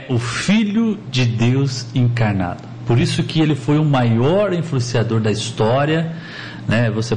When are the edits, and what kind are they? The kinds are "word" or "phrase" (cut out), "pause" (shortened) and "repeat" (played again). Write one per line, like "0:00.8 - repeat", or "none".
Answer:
none